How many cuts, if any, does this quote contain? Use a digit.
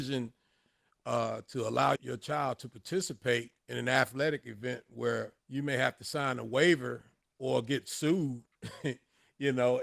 3